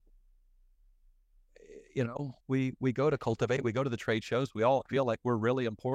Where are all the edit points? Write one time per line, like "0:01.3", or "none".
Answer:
0:02.4